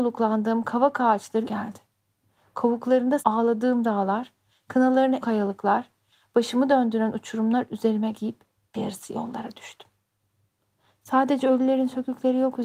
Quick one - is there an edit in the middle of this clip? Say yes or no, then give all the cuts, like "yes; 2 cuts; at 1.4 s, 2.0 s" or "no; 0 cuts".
yes; 5 cuts; at 1.4 s, 3.2 s, 5.2 s, 8.1 s, 8.7 s